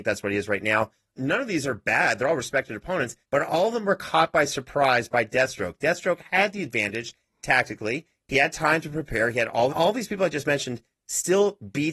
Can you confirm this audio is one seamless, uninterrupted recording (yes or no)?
no